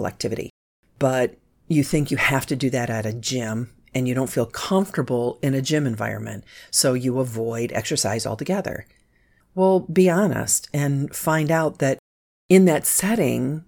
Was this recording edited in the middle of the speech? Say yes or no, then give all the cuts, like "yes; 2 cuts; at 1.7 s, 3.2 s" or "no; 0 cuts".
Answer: no; 0 cuts